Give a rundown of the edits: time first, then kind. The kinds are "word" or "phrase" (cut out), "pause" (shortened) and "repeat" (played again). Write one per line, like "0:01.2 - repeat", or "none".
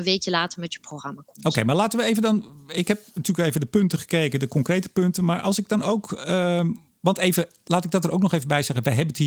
none